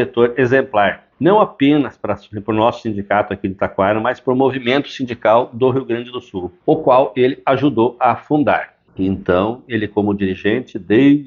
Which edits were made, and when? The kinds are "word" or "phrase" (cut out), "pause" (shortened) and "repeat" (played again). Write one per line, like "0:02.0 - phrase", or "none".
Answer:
0:01.1 - pause
0:06.6 - pause
0:08.9 - pause